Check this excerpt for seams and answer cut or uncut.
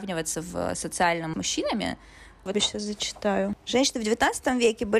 cut